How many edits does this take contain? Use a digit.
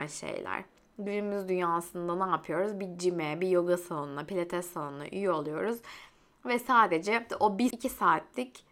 2